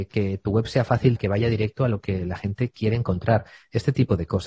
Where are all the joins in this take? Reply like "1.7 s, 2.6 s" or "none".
1.2 s

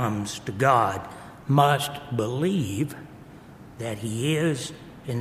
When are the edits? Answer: none

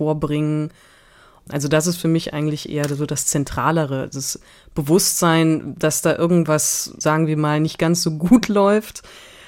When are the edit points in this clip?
none

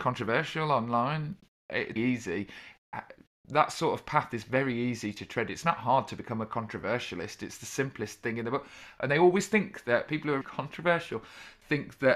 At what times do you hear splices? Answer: 2.0 s, 10.4 s

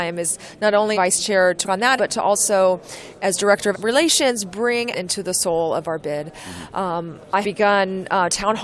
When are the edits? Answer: 0.9 s, 1.6 s, 2.0 s, 3.7 s, 4.9 s, 7.4 s

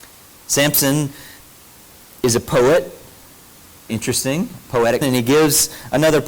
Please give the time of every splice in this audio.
3.9 s, 5.0 s

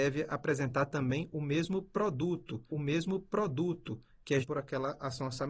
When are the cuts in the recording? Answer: 2.7 s, 4.4 s

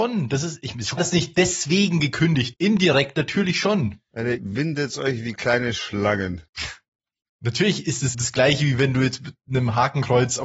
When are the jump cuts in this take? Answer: 1.0 s, 2.5 s, 4.4 s, 6.5 s, 8.1 s

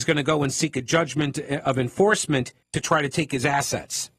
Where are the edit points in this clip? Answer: 2.6 s

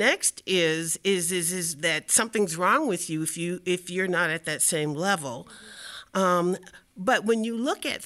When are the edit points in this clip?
none

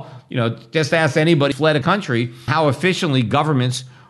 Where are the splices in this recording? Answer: 1.5 s, 1.8 s, 2.5 s

